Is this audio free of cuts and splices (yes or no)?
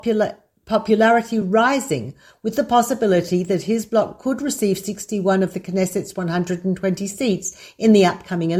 yes